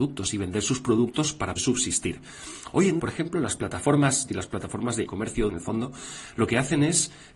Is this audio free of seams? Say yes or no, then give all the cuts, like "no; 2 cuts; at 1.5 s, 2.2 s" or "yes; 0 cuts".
no; 5 cuts; at 1.6 s, 3.0 s, 4.3 s, 5.1 s, 5.5 s